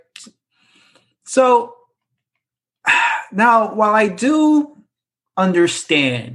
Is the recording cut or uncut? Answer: uncut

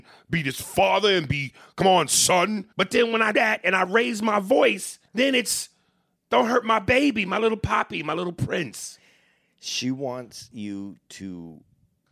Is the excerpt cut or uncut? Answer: cut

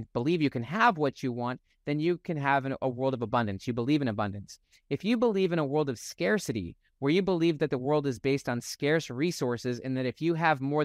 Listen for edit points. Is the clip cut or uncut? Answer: uncut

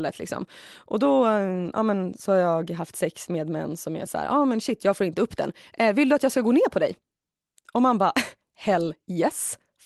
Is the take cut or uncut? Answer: uncut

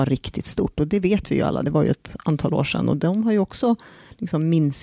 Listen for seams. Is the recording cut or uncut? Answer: uncut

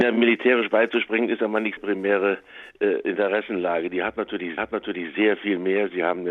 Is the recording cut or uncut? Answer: cut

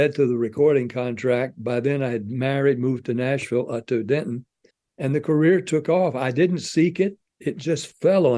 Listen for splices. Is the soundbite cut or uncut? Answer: cut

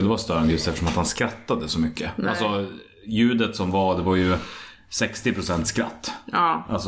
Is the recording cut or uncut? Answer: uncut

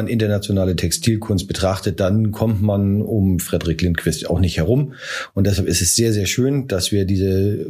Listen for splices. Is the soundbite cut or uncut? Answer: uncut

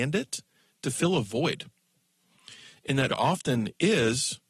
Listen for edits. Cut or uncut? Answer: cut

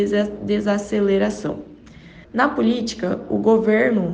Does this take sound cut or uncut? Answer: cut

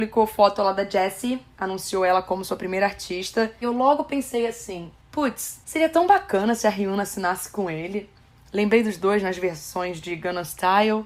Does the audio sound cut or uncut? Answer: cut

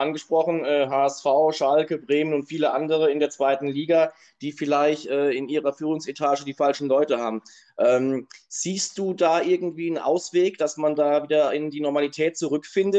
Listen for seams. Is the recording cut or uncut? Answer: uncut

